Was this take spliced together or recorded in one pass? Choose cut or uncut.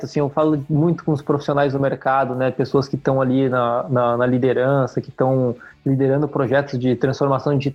uncut